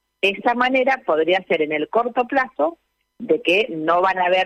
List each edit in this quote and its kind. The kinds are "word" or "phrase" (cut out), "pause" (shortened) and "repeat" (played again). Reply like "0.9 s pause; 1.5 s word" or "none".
none